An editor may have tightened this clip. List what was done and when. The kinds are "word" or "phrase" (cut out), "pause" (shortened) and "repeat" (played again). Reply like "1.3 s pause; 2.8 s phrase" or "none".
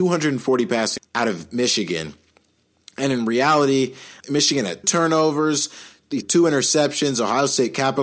1.0 s word; 4.2 s word; 4.8 s word; 6.2 s word